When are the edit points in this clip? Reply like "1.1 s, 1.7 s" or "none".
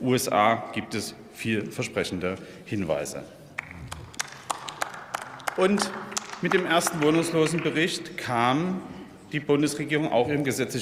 none